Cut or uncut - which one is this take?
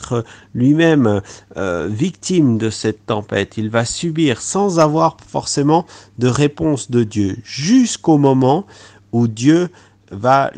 uncut